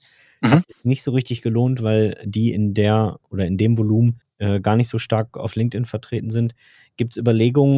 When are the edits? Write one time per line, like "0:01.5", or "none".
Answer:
0:04.2

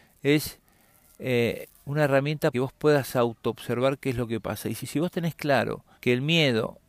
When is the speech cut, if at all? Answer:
0:02.5
0:04.8
0:05.9

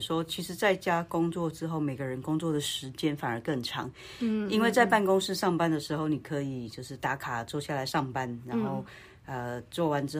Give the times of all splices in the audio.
none

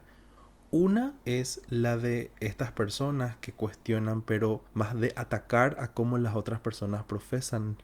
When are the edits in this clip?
0:01.2
0:04.7

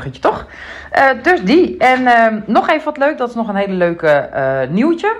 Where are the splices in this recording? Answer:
none

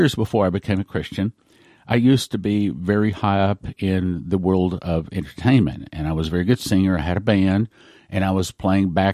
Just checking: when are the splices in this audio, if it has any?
none

